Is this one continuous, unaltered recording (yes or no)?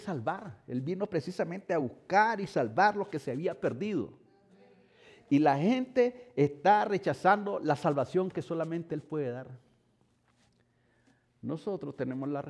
yes